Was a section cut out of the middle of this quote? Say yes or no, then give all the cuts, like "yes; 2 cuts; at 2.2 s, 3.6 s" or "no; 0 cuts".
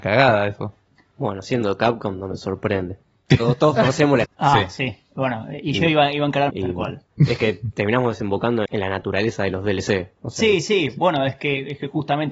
yes; 3 cuts; at 4.2 s, 6.5 s, 8.7 s